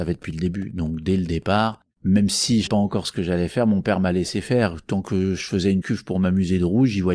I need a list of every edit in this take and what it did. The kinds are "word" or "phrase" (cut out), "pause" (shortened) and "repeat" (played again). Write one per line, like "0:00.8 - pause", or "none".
0:01.9 - pause
0:02.7 - word
0:05.8 - word